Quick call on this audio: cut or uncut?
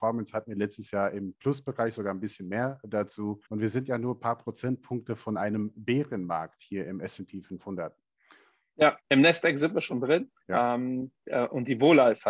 cut